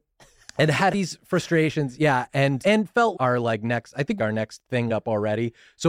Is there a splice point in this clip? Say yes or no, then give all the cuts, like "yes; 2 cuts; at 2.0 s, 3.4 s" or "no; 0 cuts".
yes; 5 cuts; at 0.9 s, 2.6 s, 3.1 s, 4.2 s, 4.9 s